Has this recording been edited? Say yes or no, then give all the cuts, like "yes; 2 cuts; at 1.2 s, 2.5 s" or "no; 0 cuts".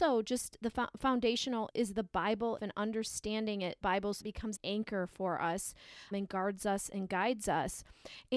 yes; 6 cuts; at 1.7 s, 2.6 s, 3.8 s, 4.2 s, 4.6 s, 6.1 s